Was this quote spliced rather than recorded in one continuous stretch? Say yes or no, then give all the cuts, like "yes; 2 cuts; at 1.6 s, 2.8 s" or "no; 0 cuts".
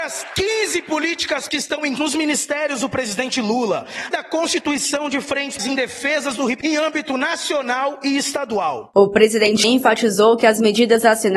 yes; 6 cuts; at 1.5 s, 2.0 s, 4.1 s, 5.6 s, 6.6 s, 9.6 s